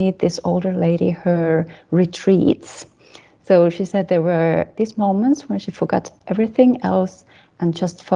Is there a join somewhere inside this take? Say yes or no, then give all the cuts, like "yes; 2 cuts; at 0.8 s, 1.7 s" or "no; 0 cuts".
no; 0 cuts